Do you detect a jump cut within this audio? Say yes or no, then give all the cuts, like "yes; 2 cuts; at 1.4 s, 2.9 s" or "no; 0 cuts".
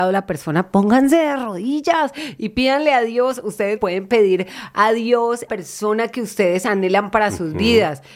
yes; 2 cuts; at 3.8 s, 5.5 s